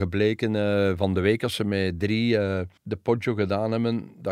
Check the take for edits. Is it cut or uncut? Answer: cut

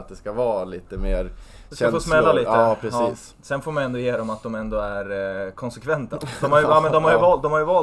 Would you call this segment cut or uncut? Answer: uncut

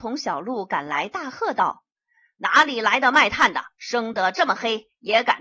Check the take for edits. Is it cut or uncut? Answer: cut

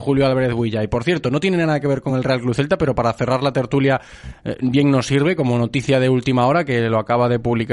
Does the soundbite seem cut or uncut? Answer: uncut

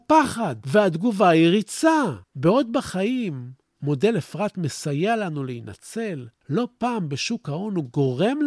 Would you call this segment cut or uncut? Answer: cut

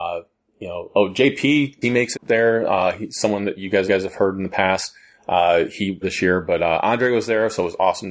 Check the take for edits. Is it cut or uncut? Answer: cut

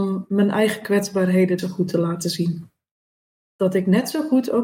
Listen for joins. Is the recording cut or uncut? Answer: cut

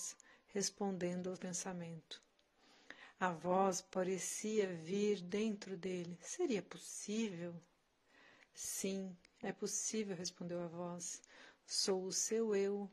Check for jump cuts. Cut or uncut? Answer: cut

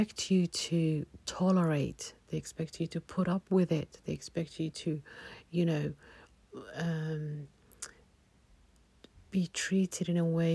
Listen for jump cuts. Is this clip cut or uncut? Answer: uncut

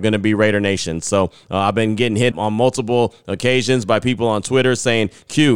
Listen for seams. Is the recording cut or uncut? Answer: cut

